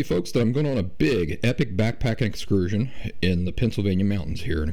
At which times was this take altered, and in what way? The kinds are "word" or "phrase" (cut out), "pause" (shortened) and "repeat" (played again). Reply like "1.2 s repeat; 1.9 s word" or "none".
none